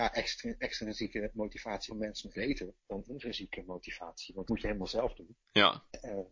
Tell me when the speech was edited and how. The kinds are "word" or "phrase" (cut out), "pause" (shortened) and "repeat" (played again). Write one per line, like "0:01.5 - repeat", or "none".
0:01.9 - phrase
0:02.3 - word
0:02.8 - pause
0:04.5 - word
0:05.4 - pause